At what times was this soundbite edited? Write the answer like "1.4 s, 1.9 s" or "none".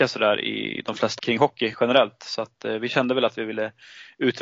1.2 s